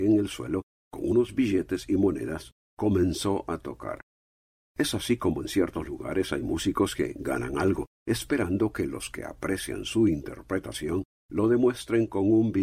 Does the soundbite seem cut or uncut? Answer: uncut